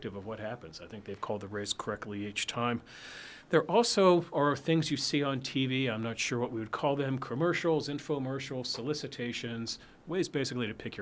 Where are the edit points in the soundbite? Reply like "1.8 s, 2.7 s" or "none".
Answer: none